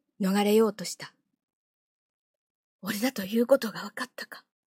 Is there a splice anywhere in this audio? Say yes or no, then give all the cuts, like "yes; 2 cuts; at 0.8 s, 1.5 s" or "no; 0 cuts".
no; 0 cuts